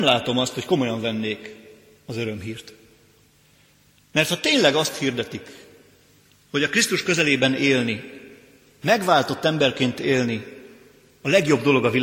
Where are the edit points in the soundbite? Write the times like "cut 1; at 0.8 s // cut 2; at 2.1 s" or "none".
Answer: none